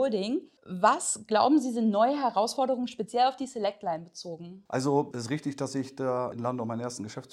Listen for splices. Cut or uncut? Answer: uncut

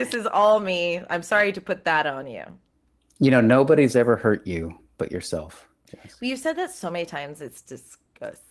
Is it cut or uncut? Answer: uncut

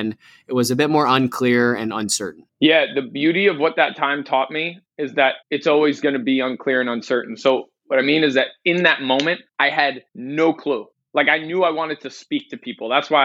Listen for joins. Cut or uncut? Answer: cut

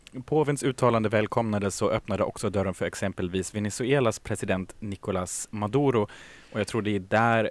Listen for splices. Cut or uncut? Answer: uncut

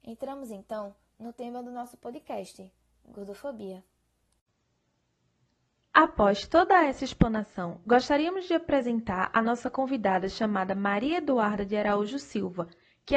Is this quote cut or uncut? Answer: uncut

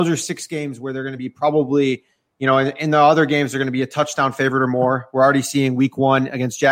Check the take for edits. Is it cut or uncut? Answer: uncut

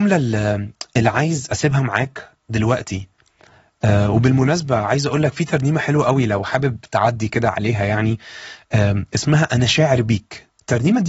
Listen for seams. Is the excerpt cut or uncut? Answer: uncut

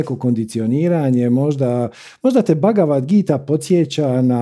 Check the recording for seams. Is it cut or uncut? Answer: uncut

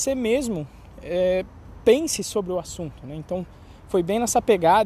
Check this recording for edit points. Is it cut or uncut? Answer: uncut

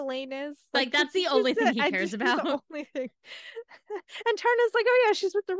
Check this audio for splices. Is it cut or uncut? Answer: uncut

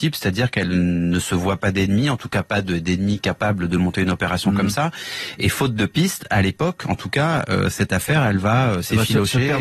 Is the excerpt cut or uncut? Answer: uncut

